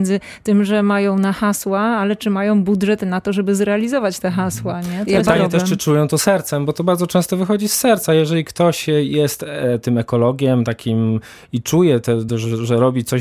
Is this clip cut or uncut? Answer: uncut